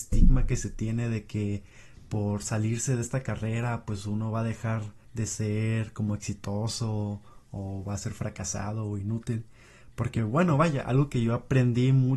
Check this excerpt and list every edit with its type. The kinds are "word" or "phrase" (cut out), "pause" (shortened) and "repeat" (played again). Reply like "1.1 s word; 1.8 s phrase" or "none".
5.0 s pause